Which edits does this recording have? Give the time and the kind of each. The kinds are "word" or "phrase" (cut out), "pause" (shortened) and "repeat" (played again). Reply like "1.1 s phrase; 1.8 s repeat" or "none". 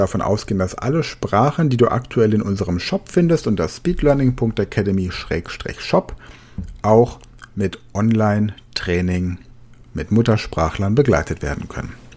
9.7 s pause